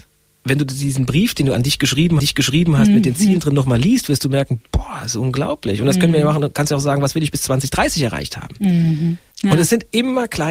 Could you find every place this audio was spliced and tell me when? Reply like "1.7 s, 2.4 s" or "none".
2.2 s, 9.3 s